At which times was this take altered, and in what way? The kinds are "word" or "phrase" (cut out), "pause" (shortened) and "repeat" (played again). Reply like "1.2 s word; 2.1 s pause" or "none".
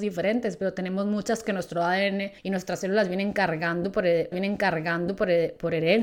1.4 s word; 2.4 s pause; 4.3 s repeat